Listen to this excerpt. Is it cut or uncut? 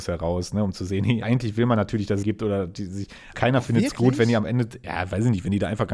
cut